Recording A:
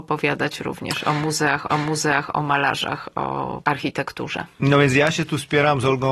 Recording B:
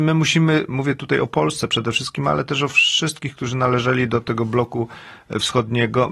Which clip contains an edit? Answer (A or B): A